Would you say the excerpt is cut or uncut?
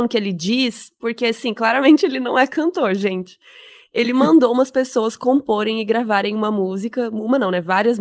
uncut